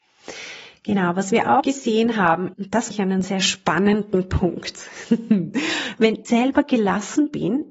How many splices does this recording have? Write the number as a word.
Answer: five